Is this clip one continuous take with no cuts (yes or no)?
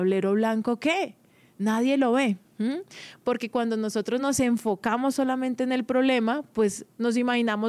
yes